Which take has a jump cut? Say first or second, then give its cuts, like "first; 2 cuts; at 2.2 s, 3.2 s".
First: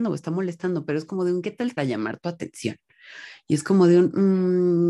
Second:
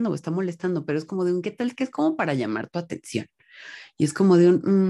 first; 1 cut; at 1.8 s